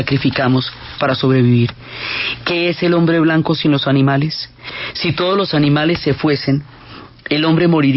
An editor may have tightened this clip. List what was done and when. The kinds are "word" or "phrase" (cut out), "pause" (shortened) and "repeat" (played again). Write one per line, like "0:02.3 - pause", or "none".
0:01.0 - word